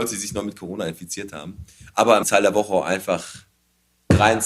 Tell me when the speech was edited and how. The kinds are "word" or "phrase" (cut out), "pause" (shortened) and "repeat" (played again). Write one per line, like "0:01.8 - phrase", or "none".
0:02.2 - phrase